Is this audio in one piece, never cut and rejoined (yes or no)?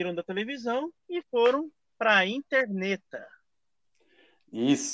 yes